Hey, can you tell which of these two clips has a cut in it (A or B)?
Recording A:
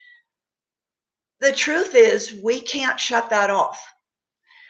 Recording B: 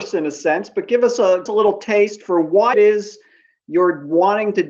B